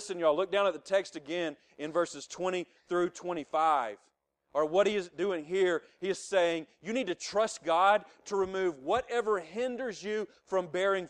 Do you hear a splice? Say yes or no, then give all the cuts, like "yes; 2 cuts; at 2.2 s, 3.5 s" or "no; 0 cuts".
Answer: no; 0 cuts